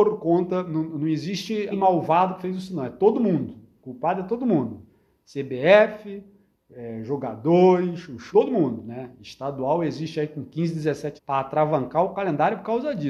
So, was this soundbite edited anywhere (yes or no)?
yes